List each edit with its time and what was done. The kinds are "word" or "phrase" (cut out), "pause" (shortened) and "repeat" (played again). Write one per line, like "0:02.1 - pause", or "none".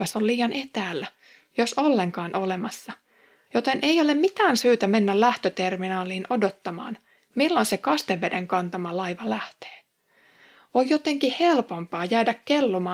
none